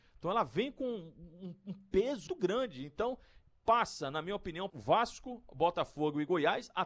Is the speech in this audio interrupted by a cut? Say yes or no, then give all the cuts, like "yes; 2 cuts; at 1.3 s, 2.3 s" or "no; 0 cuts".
yes; 3 cuts; at 2.3 s, 3.5 s, 4.7 s